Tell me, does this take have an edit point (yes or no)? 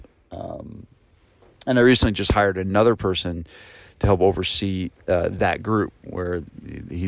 no